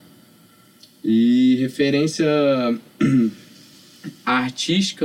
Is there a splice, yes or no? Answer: yes